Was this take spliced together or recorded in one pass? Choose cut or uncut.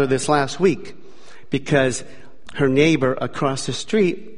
cut